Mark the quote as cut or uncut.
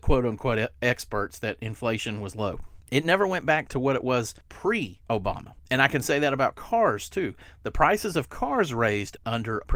uncut